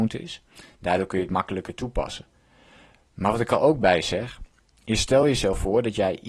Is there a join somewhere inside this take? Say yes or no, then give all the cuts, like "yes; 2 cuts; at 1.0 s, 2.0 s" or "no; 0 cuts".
no; 0 cuts